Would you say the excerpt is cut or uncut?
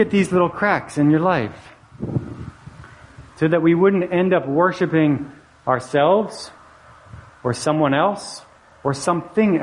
uncut